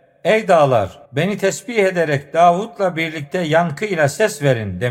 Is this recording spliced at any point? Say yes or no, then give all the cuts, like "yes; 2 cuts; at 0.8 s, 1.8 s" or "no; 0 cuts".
yes; 1 cut; at 1.0 s